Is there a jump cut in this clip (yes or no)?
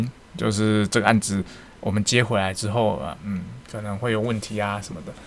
no